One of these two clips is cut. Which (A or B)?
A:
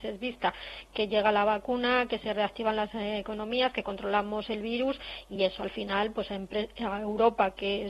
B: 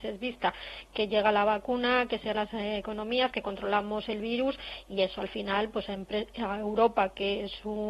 B